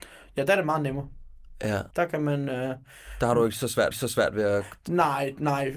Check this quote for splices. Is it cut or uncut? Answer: cut